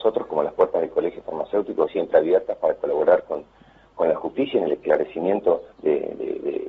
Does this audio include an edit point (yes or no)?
yes